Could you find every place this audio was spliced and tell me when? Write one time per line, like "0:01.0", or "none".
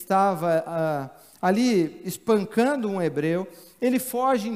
none